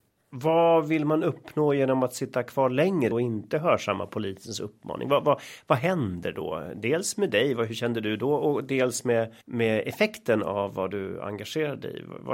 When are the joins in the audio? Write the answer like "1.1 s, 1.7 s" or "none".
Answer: 3.1 s, 9.4 s